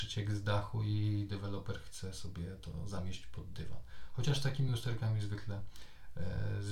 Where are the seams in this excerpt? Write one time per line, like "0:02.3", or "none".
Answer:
none